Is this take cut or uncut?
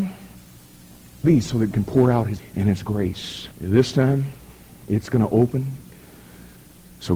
cut